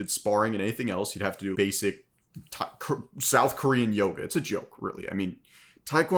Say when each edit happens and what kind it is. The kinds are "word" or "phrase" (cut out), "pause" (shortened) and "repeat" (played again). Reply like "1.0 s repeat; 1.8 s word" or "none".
1.5 s word